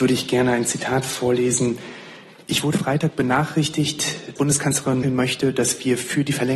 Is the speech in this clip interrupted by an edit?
yes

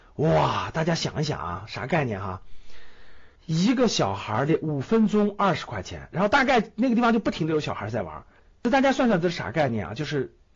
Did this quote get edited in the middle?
yes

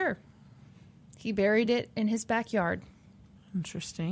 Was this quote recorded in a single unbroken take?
yes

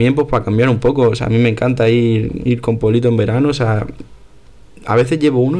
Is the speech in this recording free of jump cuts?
yes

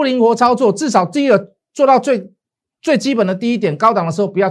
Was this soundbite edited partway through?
no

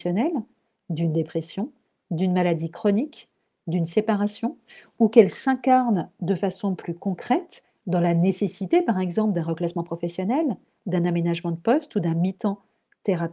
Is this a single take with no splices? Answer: yes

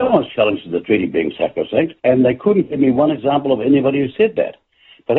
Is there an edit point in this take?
yes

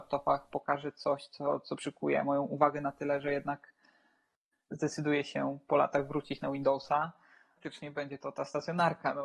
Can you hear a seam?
no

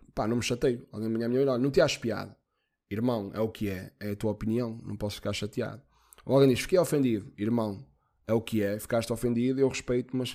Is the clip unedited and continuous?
yes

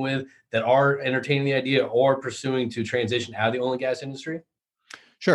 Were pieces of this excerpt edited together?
no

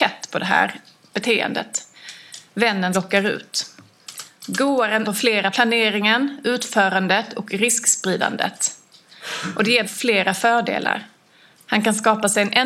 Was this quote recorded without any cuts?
no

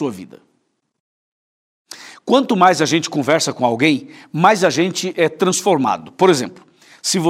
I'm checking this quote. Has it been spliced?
no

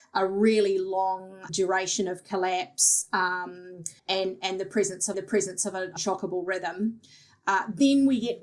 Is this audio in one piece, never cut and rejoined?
no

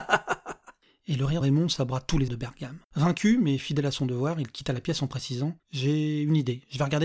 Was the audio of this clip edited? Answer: yes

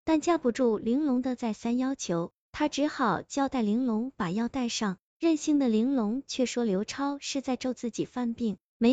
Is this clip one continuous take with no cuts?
yes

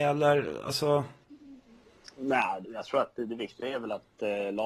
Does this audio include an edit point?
yes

